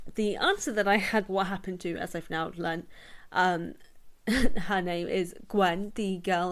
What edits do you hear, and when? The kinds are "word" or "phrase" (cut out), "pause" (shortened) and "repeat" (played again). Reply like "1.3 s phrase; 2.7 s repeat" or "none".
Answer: 1.3 s phrase